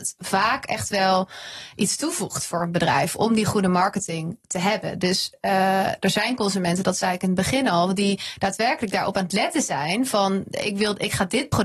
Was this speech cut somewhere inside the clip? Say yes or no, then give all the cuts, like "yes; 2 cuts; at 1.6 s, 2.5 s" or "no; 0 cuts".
no; 0 cuts